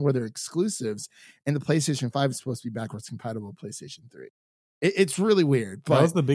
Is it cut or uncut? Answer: uncut